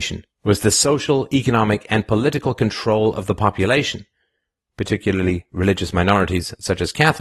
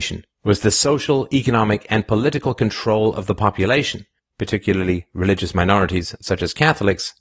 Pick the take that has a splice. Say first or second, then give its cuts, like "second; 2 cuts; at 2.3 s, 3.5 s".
second; 1 cut; at 4.2 s